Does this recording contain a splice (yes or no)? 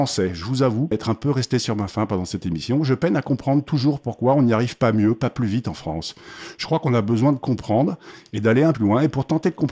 yes